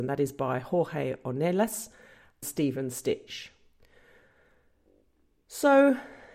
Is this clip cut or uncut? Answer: cut